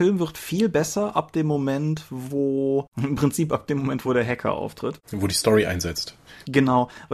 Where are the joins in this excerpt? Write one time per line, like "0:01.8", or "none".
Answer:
none

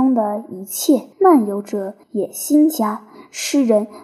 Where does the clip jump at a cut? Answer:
0:01.1
0:02.0

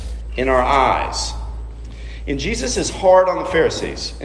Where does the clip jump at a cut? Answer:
none

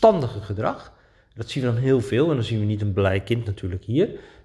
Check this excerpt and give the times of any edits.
none

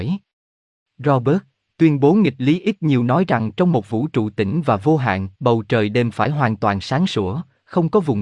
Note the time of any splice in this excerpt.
0:05.3

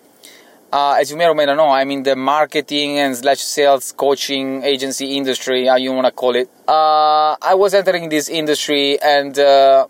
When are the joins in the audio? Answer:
0:06.5

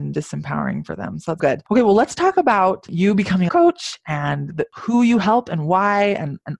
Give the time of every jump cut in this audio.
0:01.4
0:03.5

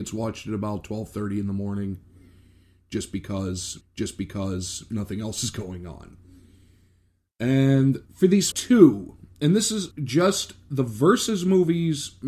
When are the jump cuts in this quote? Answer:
0:03.8
0:08.0
0:08.5
0:09.9

